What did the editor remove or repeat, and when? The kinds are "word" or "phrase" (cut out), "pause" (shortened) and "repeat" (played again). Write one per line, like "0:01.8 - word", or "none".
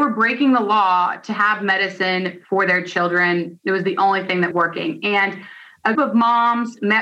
0:04.5 - word
0:05.9 - word